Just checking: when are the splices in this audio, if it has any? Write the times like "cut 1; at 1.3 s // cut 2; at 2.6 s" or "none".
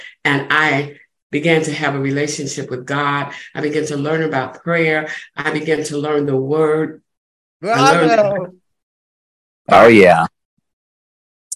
none